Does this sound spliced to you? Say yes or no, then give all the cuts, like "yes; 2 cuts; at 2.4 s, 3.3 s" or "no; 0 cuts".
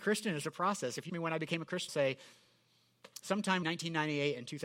yes; 3 cuts; at 1.1 s, 1.9 s, 3.6 s